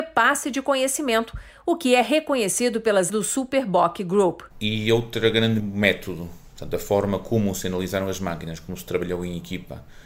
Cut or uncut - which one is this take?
cut